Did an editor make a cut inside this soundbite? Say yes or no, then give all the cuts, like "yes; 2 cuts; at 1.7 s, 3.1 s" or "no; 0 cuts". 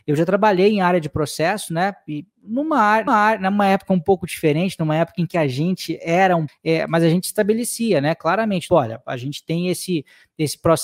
yes; 3 cuts; at 3.1 s, 6.5 s, 8.7 s